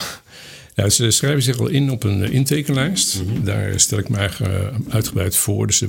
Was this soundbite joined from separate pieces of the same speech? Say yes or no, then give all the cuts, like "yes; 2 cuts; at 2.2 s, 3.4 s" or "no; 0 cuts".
no; 0 cuts